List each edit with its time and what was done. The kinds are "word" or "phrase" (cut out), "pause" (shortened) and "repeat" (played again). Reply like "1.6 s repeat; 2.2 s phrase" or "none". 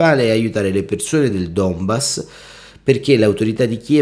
none